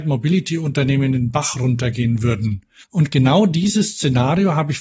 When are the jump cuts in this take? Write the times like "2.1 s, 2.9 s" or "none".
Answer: 2.8 s